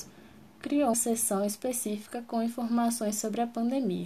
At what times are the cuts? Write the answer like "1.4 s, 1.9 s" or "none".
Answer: 0.9 s